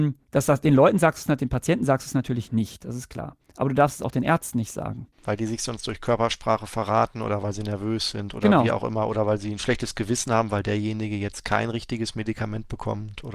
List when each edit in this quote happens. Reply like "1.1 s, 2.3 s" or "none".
5.1 s

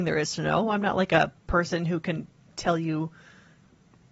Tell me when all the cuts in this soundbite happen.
none

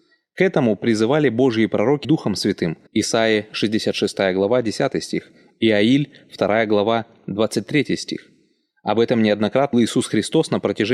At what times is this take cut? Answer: 2.0 s, 2.9 s, 9.7 s

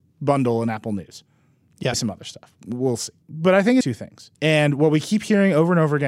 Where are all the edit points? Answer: 1.9 s, 3.2 s, 3.8 s, 4.3 s

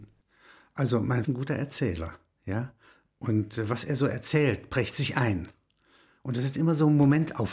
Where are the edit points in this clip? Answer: 1.2 s

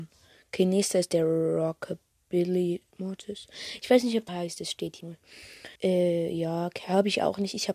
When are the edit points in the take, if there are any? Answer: 2.1 s, 4.3 s, 5.0 s, 5.8 s

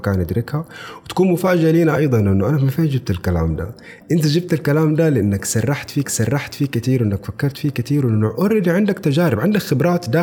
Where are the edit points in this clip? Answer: 6.0 s

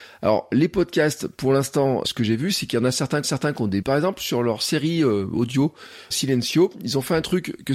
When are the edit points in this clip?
2.0 s, 3.2 s, 3.8 s, 6.1 s

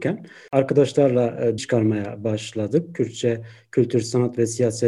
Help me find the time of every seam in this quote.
1.6 s

